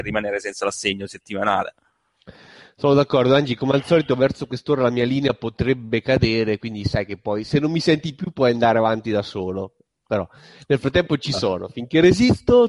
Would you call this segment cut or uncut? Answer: uncut